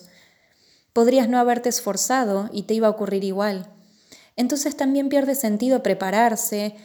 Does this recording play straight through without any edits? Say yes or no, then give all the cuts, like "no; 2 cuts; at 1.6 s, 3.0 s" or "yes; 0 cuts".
yes; 0 cuts